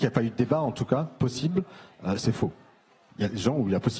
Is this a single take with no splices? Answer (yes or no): yes